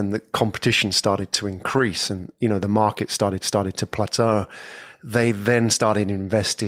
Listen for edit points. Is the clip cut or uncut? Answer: cut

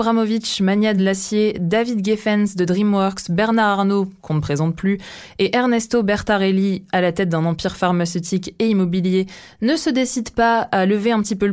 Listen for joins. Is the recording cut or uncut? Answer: uncut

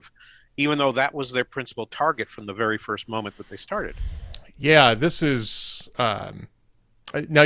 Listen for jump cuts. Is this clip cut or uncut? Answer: uncut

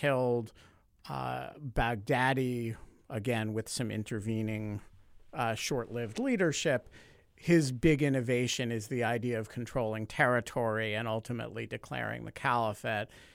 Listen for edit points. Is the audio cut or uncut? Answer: uncut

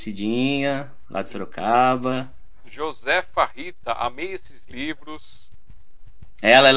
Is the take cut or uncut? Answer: uncut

